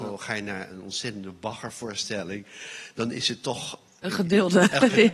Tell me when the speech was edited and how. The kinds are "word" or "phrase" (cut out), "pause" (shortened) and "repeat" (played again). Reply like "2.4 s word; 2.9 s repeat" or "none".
none